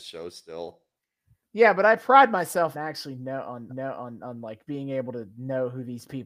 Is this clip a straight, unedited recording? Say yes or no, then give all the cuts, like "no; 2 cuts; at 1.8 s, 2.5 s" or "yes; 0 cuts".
no; 2 cuts; at 2.7 s, 3.7 s